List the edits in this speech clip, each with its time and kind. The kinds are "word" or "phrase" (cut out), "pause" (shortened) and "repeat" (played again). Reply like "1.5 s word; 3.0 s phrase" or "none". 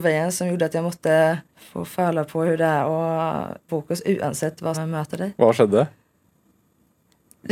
1.5 s pause; 3.7 s phrase; 4.7 s word